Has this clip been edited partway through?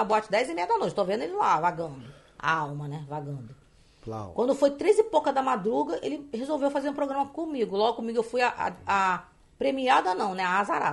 no; 0 cuts

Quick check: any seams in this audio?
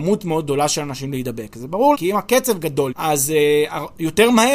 yes; 2 cuts; at 1.9 s, 2.9 s

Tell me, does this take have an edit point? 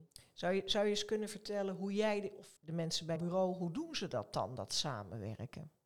yes; 2 cuts; at 2.6 s, 3.2 s

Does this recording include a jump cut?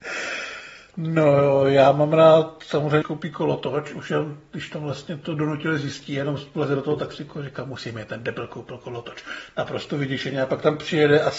yes; 1 cut; at 3.0 s

